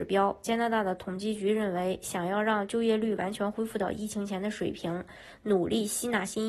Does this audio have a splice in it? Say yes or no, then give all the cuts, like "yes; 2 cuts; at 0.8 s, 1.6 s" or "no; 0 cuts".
no; 0 cuts